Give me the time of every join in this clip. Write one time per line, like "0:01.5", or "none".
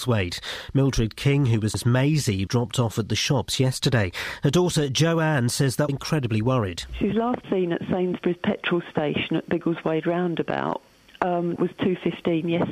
0:01.7
0:02.5
0:05.9
0:07.4
0:11.6